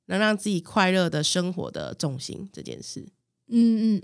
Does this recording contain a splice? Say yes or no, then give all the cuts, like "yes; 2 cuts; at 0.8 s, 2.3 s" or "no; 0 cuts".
no; 0 cuts